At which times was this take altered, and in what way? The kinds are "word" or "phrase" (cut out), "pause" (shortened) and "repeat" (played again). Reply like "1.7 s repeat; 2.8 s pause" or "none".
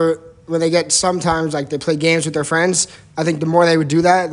none